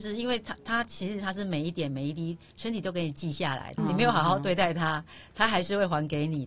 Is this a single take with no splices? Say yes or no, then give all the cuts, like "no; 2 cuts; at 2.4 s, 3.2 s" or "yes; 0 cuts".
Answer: no; 1 cut; at 3.8 s